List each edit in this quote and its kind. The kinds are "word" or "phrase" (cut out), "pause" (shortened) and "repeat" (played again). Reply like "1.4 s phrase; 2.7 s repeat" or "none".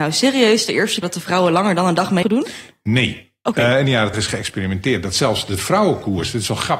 1.0 s word; 2.2 s word; 4.1 s word